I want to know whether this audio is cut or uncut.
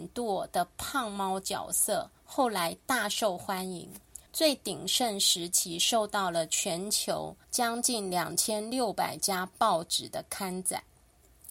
cut